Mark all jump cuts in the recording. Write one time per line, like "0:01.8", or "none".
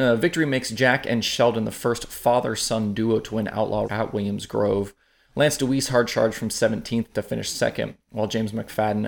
0:03.8